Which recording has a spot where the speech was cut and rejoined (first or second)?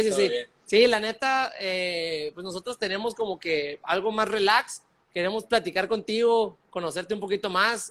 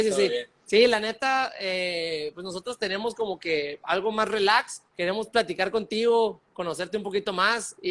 second